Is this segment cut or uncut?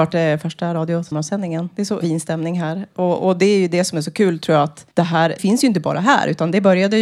cut